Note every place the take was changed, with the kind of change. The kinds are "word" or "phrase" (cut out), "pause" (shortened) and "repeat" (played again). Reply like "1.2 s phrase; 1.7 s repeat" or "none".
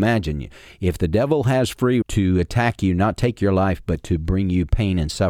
2.0 s word